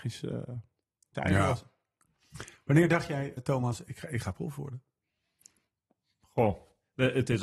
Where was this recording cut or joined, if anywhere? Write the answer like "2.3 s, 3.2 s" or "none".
1.1 s, 3.4 s